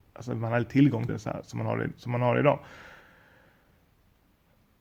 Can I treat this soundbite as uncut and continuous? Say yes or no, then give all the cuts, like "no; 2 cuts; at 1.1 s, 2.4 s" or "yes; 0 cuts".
no; 1 cut; at 1.1 s